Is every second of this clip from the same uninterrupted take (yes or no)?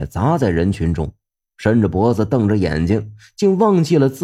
yes